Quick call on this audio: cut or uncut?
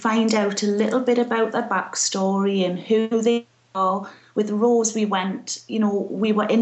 uncut